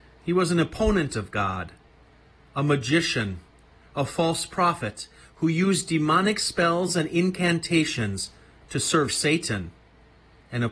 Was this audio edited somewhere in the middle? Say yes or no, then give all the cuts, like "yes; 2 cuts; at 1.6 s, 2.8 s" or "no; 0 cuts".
no; 0 cuts